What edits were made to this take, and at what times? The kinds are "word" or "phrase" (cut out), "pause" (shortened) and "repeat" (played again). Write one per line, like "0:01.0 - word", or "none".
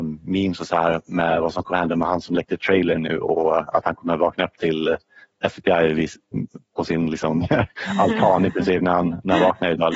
none